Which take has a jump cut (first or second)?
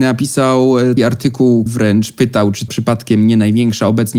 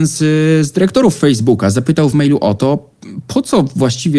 first